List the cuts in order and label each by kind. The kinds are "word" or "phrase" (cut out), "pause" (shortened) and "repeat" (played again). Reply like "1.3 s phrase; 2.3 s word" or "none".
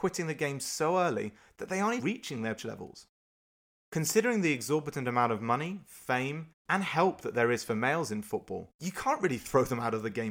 2.0 s word; 2.6 s phrase